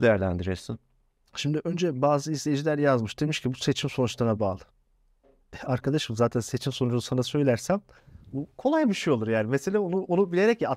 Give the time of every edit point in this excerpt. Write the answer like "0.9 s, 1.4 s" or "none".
none